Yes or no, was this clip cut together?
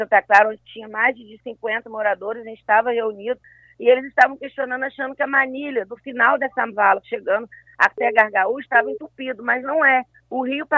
no